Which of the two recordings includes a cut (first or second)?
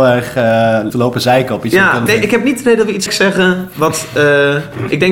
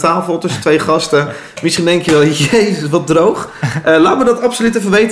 first